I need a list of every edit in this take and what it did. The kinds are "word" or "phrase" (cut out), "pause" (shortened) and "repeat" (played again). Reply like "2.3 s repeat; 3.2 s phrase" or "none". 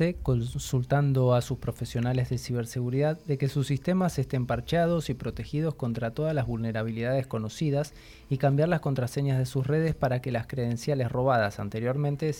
none